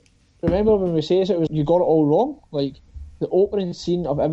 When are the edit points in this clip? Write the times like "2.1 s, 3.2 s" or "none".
1.5 s